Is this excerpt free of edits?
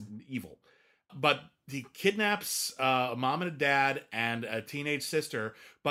no; 1 cut; at 1.1 s

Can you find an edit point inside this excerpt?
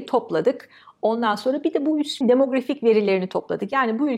yes; 1 cut; at 2.2 s

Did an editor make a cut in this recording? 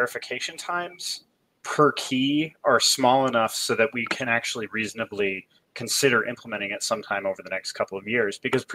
no; 0 cuts

